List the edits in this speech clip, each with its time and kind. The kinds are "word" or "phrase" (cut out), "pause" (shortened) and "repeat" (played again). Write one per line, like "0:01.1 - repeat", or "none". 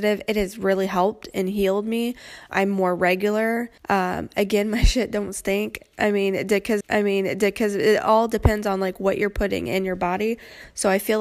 0:02.5 - word
0:03.8 - pause
0:06.8 - repeat